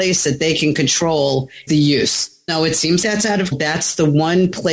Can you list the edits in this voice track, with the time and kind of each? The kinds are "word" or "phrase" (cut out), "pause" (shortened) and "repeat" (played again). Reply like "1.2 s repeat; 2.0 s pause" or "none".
1.7 s word; 2.5 s word; 3.0 s word; 3.5 s word